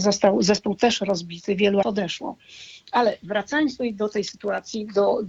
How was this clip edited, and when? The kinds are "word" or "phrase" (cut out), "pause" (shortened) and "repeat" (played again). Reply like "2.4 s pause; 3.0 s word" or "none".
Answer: 1.8 s word